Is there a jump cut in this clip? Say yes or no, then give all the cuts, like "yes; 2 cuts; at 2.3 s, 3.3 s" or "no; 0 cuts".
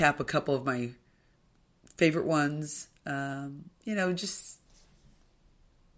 yes; 1 cut; at 3.8 s